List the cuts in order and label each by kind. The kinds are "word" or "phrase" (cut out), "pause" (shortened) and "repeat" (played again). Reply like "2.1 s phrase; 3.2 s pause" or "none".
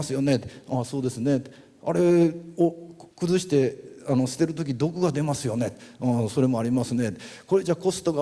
3.1 s pause